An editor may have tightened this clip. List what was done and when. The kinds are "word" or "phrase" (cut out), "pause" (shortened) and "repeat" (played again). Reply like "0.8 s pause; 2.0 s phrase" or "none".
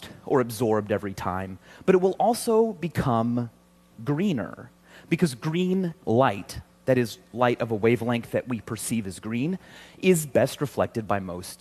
none